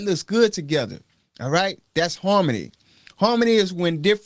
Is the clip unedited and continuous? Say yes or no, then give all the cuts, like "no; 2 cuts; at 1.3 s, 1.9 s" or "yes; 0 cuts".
yes; 0 cuts